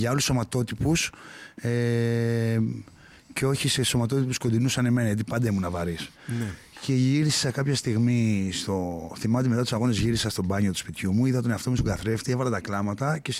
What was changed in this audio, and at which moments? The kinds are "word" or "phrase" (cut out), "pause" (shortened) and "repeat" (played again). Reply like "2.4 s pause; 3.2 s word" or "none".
none

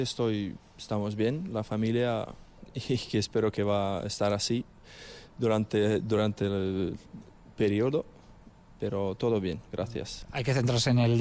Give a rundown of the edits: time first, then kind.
none

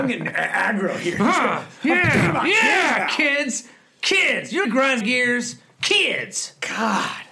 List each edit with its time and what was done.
4.6 s word; 5.0 s word

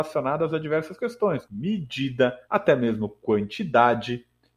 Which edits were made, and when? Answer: 1.4 s phrase; 2.4 s pause

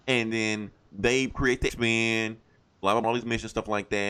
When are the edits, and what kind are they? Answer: 1.7 s word; 3.0 s phrase

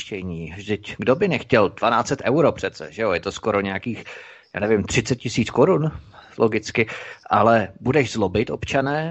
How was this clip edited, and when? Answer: none

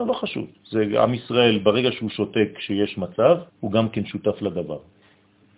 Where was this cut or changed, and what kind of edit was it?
3.5 s pause

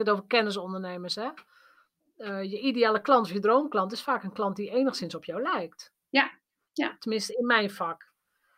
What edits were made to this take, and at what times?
none

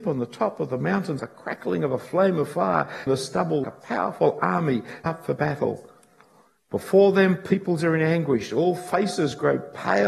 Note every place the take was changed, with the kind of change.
1.2 s word; 3.1 s word; 3.6 s word; 5.1 s word

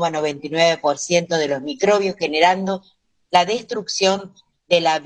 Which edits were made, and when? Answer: none

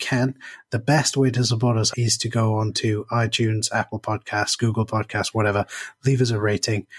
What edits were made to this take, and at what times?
1.9 s word

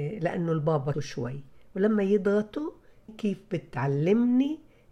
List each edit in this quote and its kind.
0.9 s phrase; 3.1 s word

